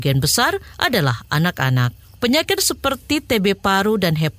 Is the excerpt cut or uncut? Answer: cut